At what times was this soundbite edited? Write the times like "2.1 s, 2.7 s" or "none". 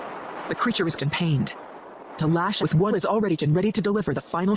1.0 s, 2.2 s, 2.6 s, 2.9 s, 3.4 s